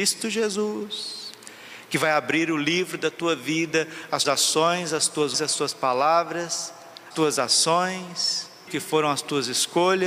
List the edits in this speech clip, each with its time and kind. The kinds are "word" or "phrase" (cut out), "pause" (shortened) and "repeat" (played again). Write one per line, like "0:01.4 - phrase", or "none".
0:04.2 - word
0:05.3 - word
0:07.1 - word
0:08.7 - word